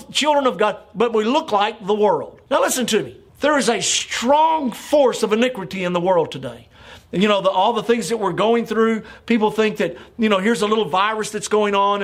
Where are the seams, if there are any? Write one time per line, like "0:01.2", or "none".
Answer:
0:02.5
0:03.3